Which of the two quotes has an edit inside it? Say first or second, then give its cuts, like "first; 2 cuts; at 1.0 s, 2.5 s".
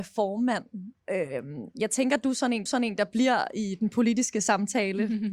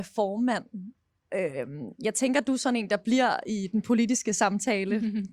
first; 2 cuts; at 1.0 s, 2.7 s